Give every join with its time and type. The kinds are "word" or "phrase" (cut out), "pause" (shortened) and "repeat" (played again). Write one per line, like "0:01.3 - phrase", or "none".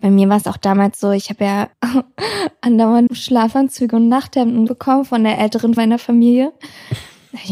0:03.1 - word
0:04.7 - word
0:05.8 - word